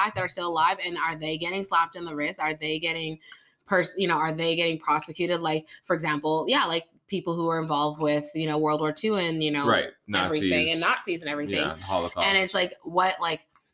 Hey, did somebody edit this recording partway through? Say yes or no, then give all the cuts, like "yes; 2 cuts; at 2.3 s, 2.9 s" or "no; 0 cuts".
no; 0 cuts